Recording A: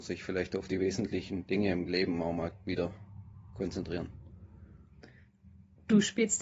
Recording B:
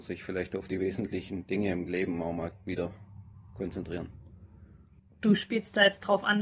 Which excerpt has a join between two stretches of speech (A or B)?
B